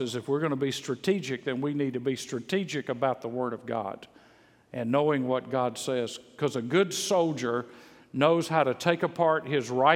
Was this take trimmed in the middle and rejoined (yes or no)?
no